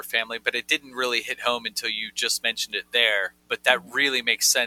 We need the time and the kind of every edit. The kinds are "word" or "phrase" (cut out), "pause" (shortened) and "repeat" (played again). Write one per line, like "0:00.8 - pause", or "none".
none